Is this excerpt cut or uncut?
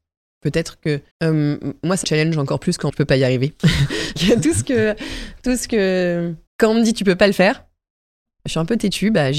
cut